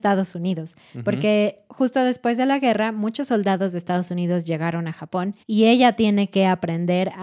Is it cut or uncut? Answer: cut